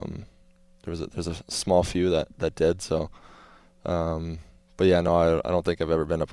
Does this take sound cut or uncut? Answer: uncut